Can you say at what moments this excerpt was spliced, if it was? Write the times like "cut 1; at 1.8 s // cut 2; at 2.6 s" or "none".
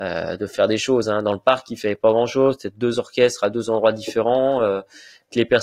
none